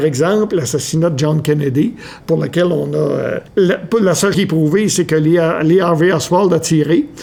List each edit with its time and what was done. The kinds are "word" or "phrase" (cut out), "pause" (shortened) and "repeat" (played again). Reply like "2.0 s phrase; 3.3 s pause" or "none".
2.2 s word; 3.5 s pause; 4.3 s word